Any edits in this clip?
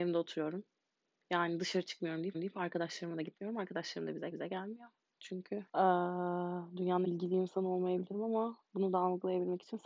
yes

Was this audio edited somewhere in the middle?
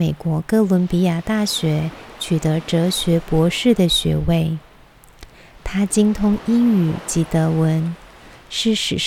no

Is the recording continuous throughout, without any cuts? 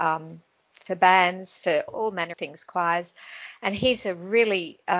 no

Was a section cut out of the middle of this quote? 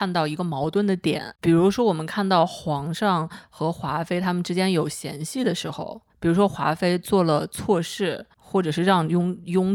yes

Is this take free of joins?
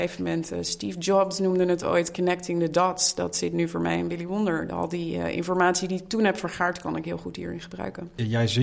yes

